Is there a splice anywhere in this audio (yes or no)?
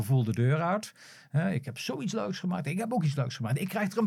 no